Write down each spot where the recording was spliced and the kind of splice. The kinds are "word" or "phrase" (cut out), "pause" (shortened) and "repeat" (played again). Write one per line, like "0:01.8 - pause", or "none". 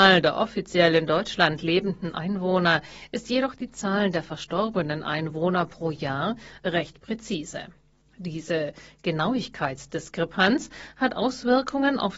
none